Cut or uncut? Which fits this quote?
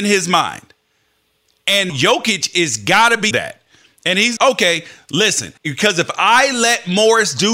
cut